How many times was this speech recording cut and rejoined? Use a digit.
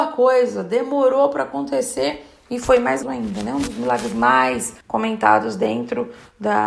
2